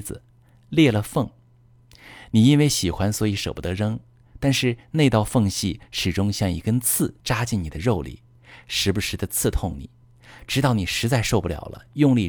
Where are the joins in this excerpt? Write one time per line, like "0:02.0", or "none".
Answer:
0:07.2